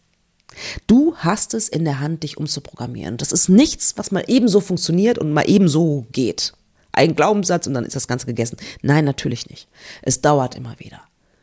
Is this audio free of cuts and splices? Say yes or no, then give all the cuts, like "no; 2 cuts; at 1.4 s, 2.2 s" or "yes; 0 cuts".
yes; 0 cuts